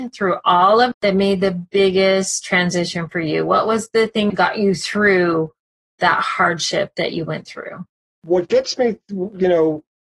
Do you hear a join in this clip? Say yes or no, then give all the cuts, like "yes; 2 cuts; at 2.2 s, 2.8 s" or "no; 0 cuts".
yes; 2 cuts; at 0.9 s, 4.3 s